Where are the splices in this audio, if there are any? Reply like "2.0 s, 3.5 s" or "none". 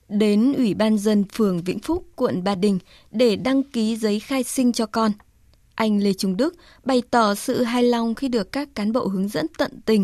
none